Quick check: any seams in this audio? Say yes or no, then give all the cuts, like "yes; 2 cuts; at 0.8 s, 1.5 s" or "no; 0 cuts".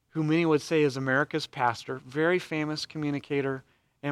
no; 0 cuts